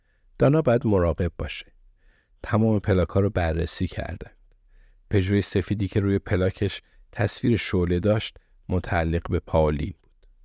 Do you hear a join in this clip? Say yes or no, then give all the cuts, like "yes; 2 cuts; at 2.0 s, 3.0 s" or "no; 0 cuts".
no; 0 cuts